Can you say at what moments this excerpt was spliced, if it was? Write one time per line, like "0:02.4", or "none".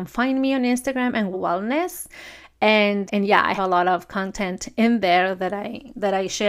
0:01.3
0:03.1
0:03.6